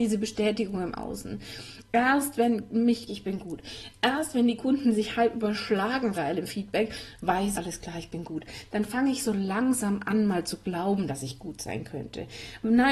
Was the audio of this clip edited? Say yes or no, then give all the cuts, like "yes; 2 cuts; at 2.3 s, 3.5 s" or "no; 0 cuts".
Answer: yes; 3 cuts; at 3.1 s, 6.1 s, 7.5 s